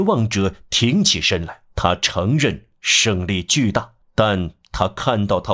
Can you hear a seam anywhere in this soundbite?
yes; 2 cuts; at 1.7 s, 4.0 s

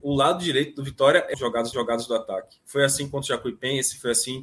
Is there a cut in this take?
yes; 2 cuts; at 1.3 s, 1.7 s

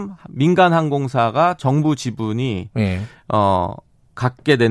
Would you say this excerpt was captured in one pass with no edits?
yes; 0 cuts

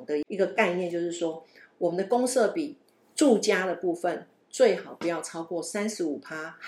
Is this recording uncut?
yes; 0 cuts

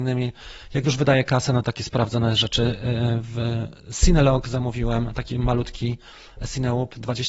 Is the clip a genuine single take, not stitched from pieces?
yes; 0 cuts

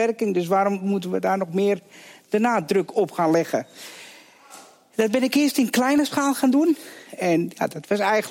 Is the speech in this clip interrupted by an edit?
no; 0 cuts

